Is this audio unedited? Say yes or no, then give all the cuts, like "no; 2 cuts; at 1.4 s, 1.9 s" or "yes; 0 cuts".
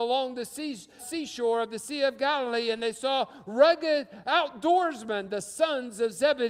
no; 1 cut; at 1.0 s